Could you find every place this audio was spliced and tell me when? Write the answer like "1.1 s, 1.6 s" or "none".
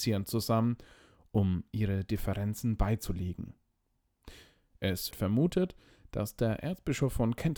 5.1 s